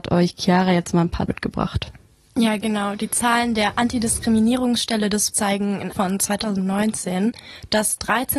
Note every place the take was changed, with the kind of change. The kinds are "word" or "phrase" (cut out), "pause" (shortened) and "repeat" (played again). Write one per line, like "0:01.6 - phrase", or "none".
0:01.3 - word
0:05.3 - word
0:05.9 - phrase